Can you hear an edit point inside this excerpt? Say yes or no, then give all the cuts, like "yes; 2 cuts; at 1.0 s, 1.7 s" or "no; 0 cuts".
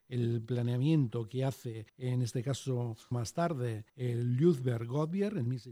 yes; 3 cuts; at 1.9 s, 3.1 s, 3.9 s